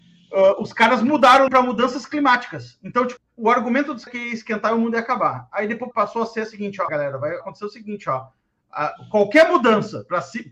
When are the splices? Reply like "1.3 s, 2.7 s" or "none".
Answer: 1.5 s, 3.2 s, 4.1 s, 5.9 s, 6.9 s, 7.4 s